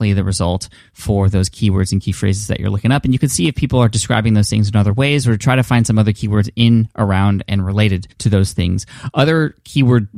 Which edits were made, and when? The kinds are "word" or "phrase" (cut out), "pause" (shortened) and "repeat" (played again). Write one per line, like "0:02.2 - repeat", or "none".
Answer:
0:08.1 - pause

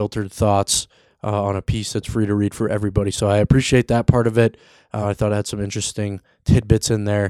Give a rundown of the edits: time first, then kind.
none

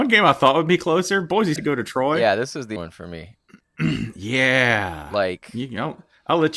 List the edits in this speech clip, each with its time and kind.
0:01.6 - phrase
0:02.8 - word
0:03.6 - pause

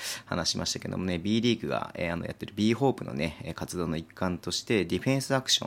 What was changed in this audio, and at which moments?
none

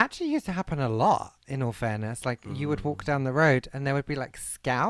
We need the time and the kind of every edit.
none

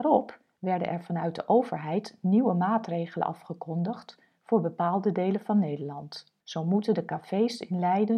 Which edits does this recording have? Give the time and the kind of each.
0:06.4 - pause

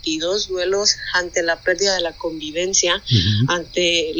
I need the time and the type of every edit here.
none

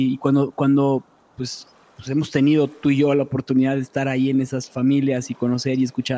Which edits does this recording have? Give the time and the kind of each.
none

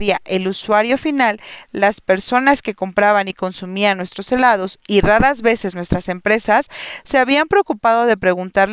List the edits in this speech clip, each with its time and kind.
none

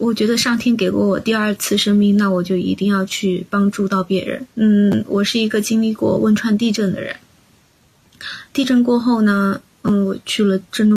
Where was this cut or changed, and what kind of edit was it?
0:04.5 - pause

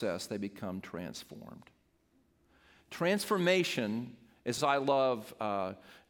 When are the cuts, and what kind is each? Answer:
0:04.6 - phrase

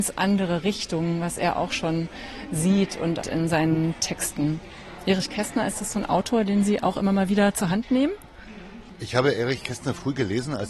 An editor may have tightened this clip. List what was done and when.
0:03.2 - phrase

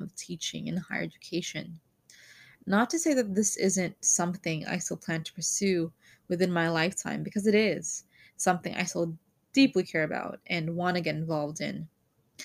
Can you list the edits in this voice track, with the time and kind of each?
none

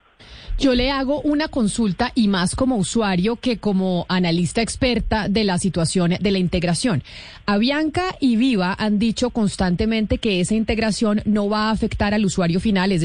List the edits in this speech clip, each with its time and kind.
none

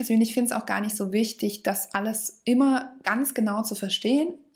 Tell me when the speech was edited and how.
none

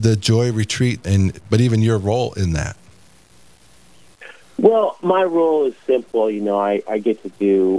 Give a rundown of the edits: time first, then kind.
0:01.0 - phrase

